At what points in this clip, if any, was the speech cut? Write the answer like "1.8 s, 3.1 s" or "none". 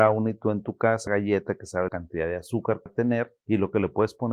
1.1 s, 1.9 s, 2.9 s, 3.4 s